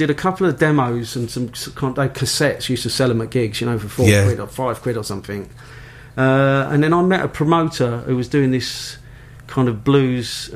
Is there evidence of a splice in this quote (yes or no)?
no